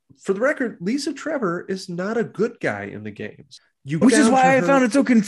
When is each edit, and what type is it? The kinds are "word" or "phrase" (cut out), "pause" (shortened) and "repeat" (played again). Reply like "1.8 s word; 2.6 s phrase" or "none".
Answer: 4.0 s word